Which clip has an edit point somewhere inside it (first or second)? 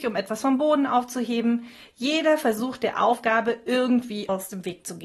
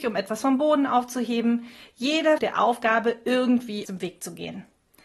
second